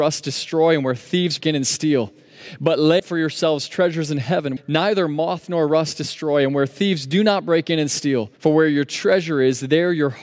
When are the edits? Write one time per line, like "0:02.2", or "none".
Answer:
0:01.4
0:03.0
0:04.6
0:08.4